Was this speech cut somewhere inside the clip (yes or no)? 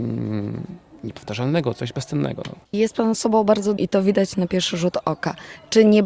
yes